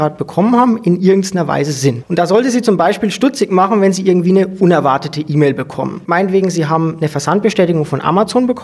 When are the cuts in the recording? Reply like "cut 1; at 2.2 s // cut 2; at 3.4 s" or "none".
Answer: none